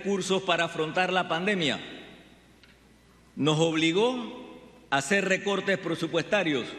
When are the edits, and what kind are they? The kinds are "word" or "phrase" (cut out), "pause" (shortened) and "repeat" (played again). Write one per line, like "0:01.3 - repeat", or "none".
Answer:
none